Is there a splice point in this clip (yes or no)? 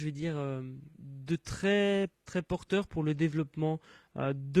yes